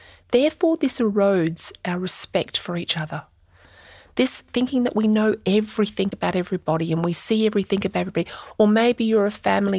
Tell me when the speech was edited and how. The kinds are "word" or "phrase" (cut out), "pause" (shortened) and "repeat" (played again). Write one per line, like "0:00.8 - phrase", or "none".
none